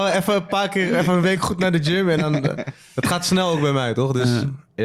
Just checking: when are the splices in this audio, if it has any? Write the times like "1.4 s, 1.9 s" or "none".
none